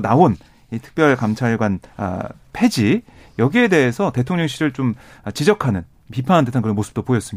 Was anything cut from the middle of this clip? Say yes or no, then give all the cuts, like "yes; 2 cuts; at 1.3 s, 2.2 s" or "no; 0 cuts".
yes; 1 cut; at 1.9 s